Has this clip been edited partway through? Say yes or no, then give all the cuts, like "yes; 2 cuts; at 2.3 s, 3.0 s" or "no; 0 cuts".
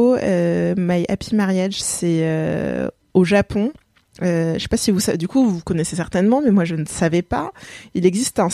no; 0 cuts